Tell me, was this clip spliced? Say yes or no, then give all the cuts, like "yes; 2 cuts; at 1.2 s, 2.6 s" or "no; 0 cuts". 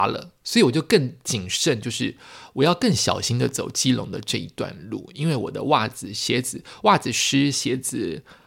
no; 0 cuts